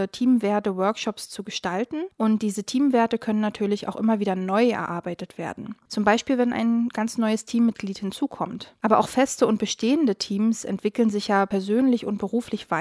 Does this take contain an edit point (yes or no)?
no